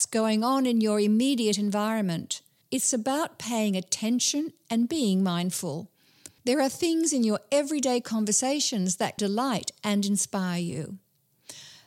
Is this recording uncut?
no; 3 cuts; at 2.6 s, 6.4 s, 9.2 s

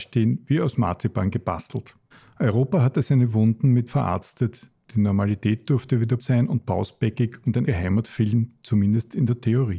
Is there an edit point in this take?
yes; 4 cuts; at 2.1 s, 3.9 s, 6.2 s, 7.7 s

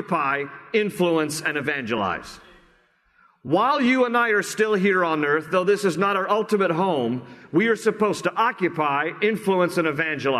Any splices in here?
no; 0 cuts

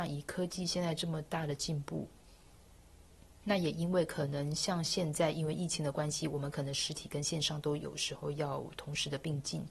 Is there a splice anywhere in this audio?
no; 0 cuts

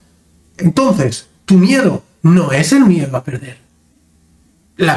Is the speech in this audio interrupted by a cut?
no; 0 cuts

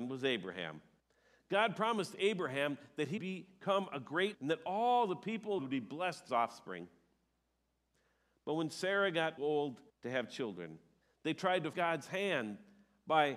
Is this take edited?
yes; 9 cuts; at 1.0 s, 3.2 s, 4.3 s, 5.6 s, 6.3 s, 9.4 s, 9.9 s, 11.0 s, 11.7 s

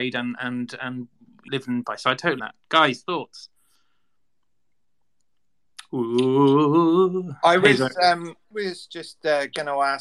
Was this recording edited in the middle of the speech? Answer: yes; 4 cuts; at 1.5 s, 1.8 s, 2.4 s, 8.5 s

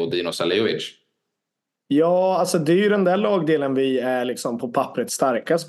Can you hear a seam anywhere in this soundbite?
no; 0 cuts

